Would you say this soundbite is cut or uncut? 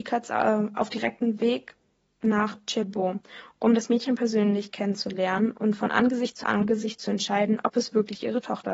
uncut